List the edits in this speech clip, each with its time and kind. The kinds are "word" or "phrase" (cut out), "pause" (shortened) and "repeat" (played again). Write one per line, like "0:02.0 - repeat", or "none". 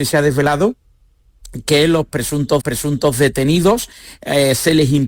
0:02.6 - repeat

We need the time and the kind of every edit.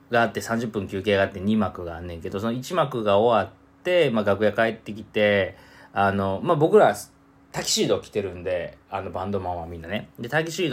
none

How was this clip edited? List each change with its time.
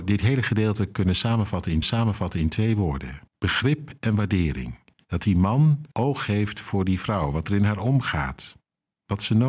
0:01.8 - repeat
0:03.3 - pause
0:04.9 - pause
0:05.9 - pause

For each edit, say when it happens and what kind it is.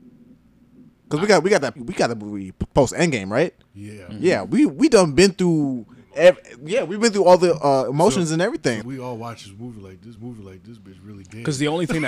0:01.8 - word
0:08.8 - word
0:10.2 - repeat

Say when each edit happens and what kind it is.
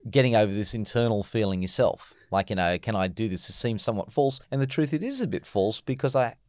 0:04.4 - pause

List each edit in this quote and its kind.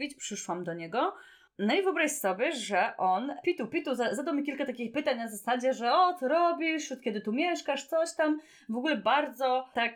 none

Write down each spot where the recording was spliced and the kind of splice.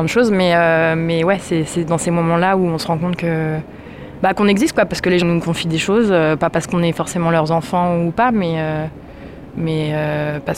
0:05.2 - word

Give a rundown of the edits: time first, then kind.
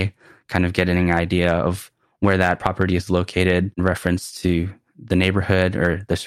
none

